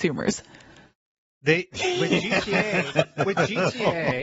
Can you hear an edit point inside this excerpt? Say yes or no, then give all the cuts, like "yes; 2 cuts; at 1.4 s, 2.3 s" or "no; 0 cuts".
no; 0 cuts